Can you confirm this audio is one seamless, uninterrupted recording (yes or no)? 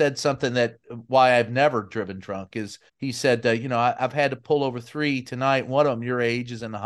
no